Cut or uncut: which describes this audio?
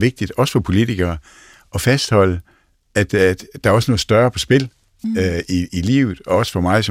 uncut